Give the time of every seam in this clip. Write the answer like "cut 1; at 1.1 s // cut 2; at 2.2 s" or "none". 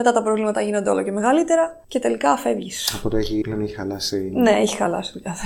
cut 1; at 1.8 s // cut 2; at 3.4 s